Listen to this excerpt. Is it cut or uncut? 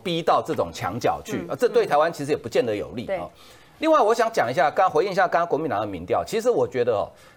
uncut